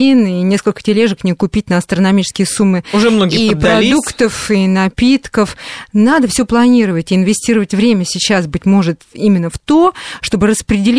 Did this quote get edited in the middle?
no; 0 cuts

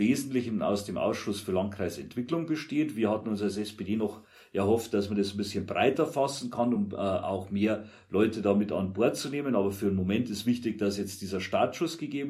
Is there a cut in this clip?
no; 0 cuts

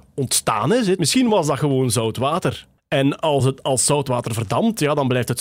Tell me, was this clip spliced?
no; 0 cuts

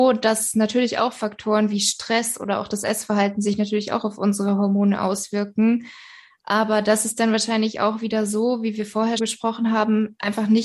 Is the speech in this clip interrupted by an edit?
yes; 1 cut; at 9.2 s

